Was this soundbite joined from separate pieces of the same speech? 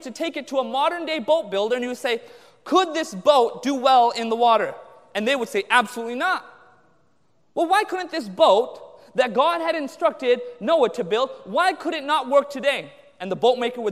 no; 0 cuts

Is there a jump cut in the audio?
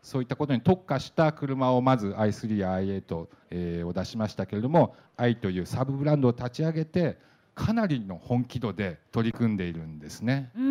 no; 0 cuts

